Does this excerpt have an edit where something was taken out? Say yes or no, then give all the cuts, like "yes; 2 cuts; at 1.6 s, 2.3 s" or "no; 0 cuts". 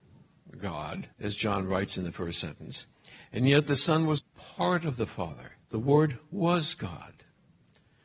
yes; 3 cuts; at 1.1 s, 4.2 s, 5.6 s